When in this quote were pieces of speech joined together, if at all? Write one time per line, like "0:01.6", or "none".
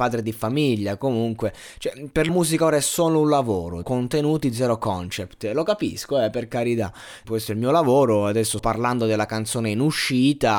0:02.3
0:03.8
0:07.2
0:08.6